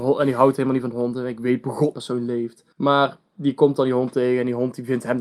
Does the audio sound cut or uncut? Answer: cut